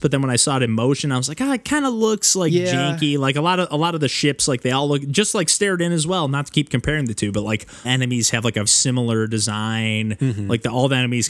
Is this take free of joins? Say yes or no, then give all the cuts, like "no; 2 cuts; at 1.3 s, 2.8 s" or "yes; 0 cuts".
no; 2 cuts; at 7.8 s, 8.7 s